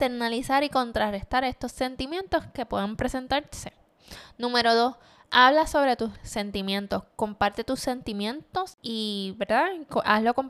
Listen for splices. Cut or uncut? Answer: uncut